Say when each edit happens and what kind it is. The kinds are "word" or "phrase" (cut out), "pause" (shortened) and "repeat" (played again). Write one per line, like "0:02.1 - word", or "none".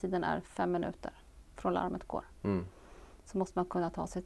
none